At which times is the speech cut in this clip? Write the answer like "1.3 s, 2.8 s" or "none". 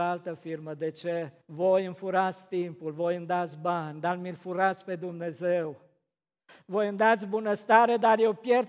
1.4 s